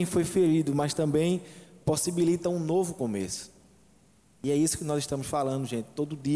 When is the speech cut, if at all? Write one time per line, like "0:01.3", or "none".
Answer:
none